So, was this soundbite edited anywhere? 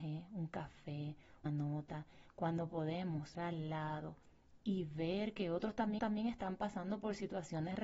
yes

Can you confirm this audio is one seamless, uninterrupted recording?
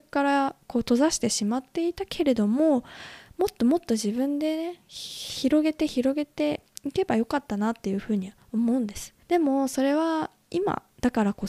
no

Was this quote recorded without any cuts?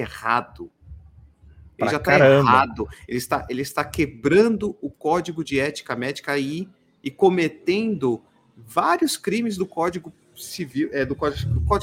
yes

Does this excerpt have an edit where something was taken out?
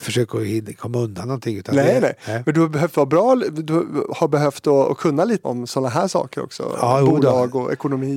yes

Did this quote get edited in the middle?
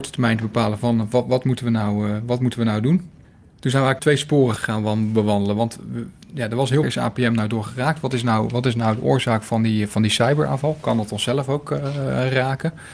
yes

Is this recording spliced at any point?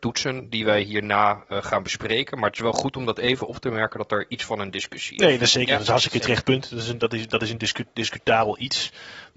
no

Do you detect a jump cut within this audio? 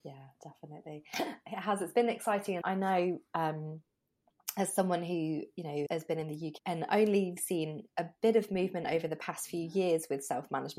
yes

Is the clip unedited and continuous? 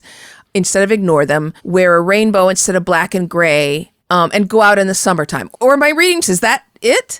no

